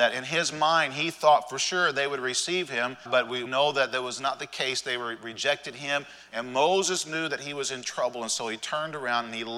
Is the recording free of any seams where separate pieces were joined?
no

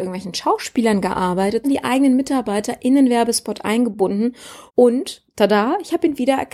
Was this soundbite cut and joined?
yes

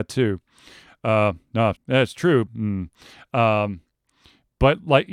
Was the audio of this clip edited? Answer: yes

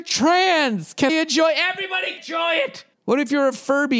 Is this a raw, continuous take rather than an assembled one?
no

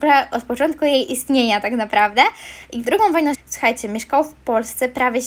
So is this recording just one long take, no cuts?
no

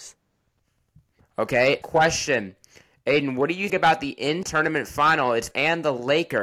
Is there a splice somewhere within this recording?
yes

